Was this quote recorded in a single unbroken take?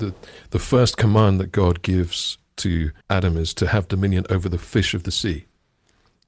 no; 1 cut; at 3.0 s

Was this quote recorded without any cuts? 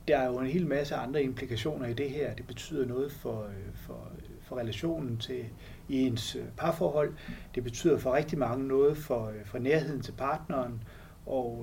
yes; 0 cuts

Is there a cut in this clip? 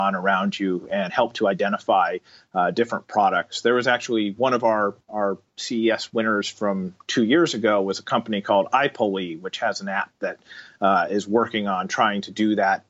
no; 0 cuts

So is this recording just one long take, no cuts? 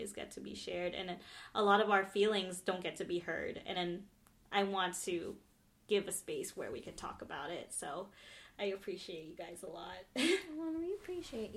yes; 0 cuts

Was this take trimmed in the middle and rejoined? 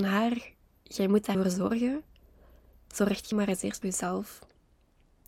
yes; 3 cuts; at 1.3 s, 3.3 s, 3.8 s

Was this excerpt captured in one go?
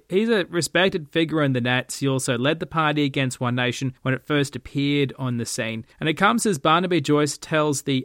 no; 2 cuts; at 4.0 s, 5.9 s

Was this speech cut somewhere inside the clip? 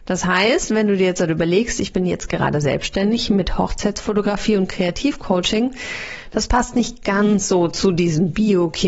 no; 0 cuts

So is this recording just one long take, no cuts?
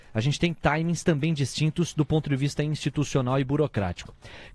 yes; 0 cuts

